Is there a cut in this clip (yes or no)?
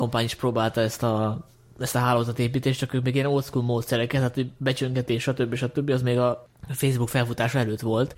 no